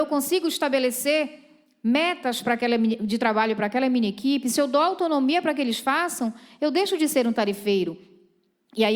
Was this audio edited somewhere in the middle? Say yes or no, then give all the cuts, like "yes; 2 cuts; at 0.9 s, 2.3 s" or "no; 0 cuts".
no; 0 cuts